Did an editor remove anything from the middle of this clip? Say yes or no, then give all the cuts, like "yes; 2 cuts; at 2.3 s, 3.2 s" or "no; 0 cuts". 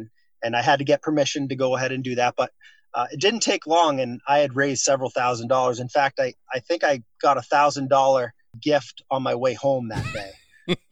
no; 0 cuts